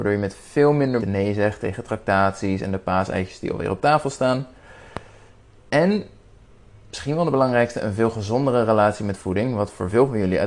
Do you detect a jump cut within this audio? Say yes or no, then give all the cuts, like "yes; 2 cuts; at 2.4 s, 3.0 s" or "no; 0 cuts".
yes; 1 cut; at 1.0 s